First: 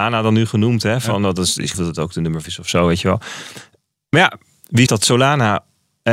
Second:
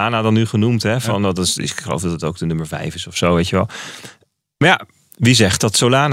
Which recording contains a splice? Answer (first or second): first